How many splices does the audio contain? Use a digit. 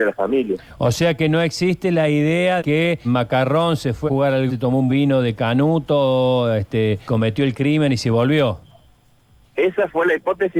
6